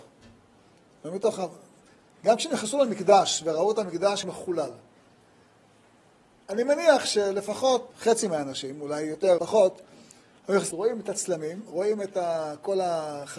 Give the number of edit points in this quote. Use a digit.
4